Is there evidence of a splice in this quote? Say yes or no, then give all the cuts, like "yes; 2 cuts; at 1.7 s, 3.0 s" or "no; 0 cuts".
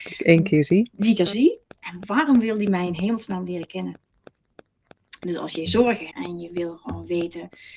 yes; 3 cuts; at 1.2 s, 1.6 s, 6.1 s